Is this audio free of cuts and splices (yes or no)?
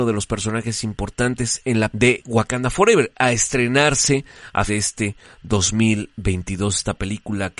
no